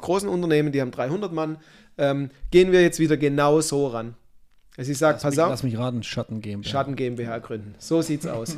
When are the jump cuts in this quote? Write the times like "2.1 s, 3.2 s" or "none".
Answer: none